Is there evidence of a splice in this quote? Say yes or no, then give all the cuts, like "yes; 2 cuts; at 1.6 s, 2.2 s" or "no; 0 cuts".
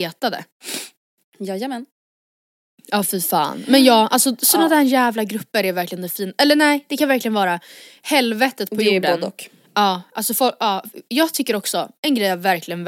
no; 0 cuts